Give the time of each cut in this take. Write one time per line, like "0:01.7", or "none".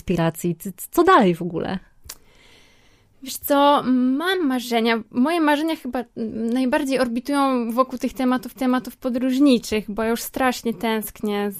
0:08.6